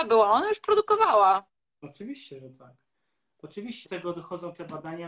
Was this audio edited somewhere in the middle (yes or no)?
yes